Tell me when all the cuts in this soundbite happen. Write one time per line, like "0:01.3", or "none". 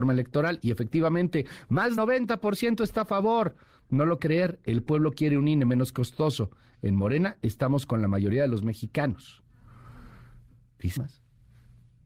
0:02.0
0:04.2
0:11.0

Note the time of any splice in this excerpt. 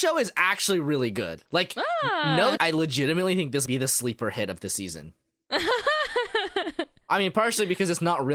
0:01.5
0:02.6
0:03.7

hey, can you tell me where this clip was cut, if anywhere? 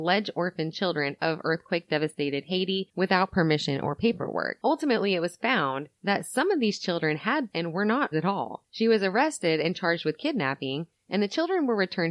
0:01.2
0:07.5
0:08.1

